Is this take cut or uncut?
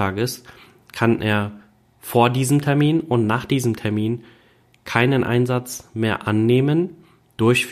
uncut